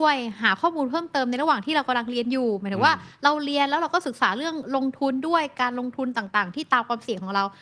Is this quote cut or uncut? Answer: uncut